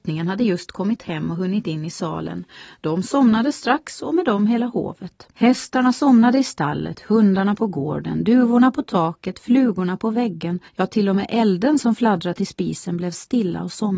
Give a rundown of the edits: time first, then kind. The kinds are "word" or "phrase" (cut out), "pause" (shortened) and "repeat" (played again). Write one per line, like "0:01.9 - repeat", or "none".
0:05.3 - pause
0:10.7 - pause

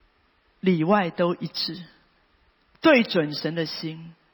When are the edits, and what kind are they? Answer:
none

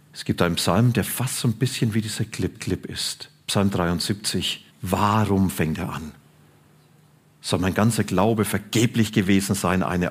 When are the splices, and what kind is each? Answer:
0:02.5 - repeat
0:04.7 - pause

